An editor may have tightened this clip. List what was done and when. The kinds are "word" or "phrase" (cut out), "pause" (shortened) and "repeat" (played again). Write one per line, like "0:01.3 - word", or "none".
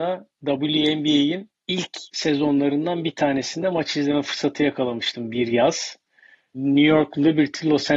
none